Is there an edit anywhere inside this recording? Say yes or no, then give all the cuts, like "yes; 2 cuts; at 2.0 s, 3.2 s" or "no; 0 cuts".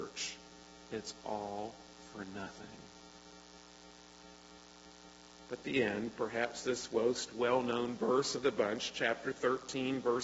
no; 0 cuts